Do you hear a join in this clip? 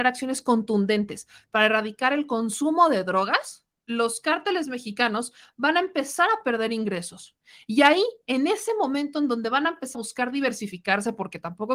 yes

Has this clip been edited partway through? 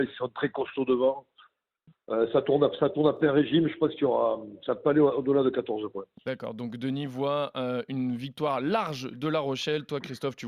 no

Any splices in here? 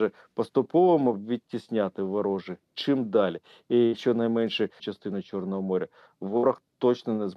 yes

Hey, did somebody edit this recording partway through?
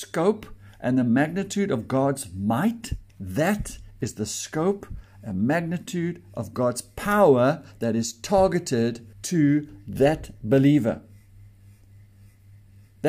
yes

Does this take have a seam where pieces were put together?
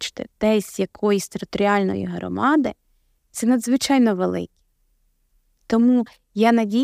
no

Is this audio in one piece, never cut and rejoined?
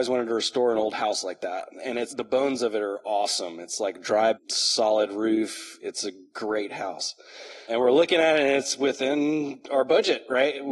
no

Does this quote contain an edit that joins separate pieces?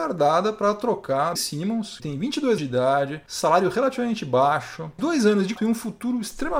yes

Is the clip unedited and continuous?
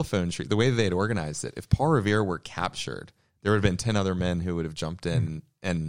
yes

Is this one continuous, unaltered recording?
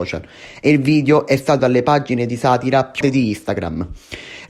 no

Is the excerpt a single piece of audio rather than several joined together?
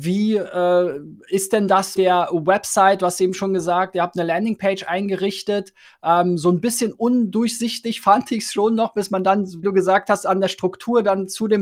no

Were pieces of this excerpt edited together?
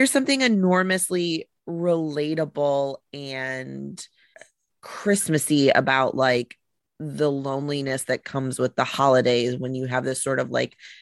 yes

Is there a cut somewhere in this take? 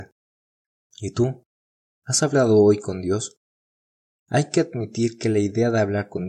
no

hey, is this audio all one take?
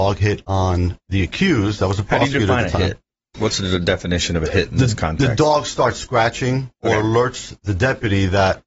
yes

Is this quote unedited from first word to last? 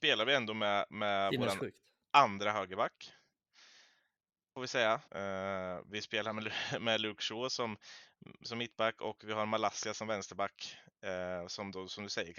no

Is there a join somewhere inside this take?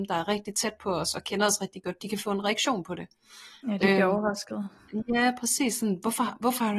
no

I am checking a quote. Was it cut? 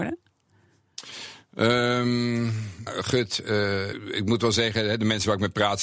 yes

